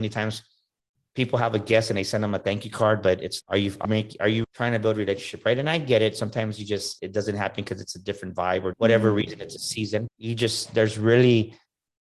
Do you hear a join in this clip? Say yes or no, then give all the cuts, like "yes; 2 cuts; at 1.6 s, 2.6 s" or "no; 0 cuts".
yes; 6 cuts; at 3.4 s, 3.8 s, 4.4 s, 7.0 s, 8.7 s, 10.1 s